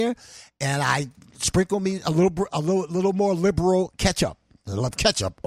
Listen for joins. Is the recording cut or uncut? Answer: uncut